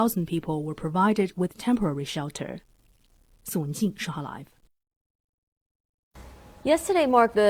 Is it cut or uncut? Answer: uncut